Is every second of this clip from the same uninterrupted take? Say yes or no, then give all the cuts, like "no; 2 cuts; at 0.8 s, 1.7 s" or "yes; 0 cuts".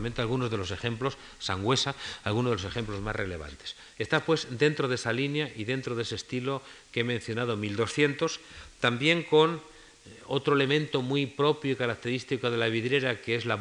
yes; 0 cuts